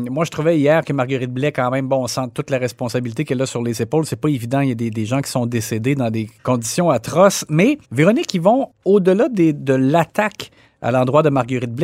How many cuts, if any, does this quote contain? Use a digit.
2